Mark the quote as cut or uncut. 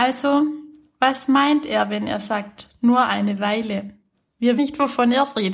cut